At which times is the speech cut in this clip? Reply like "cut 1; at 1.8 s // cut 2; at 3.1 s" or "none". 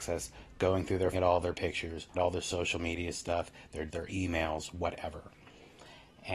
cut 1; at 1.1 s // cut 2; at 2.1 s // cut 3; at 3.9 s